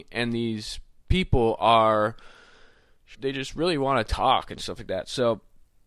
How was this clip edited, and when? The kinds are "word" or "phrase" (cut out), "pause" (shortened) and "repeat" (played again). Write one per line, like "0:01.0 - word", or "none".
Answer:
0:03.1 - word